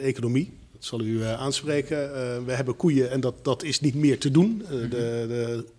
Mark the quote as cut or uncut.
uncut